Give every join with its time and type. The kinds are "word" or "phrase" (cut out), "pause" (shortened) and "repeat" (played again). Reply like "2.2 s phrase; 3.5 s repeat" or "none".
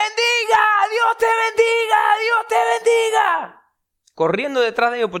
none